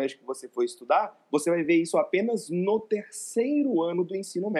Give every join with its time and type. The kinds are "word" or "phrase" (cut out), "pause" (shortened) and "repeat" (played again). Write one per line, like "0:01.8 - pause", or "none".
none